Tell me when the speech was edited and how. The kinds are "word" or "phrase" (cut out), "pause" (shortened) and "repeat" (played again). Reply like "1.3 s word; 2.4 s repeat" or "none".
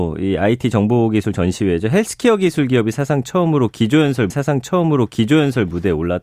4.3 s repeat